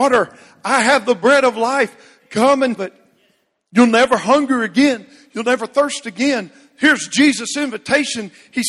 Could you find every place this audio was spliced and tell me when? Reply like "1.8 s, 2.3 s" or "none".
2.8 s